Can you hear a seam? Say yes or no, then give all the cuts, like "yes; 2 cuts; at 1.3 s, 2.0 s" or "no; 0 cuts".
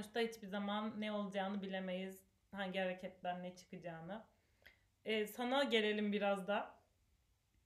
no; 0 cuts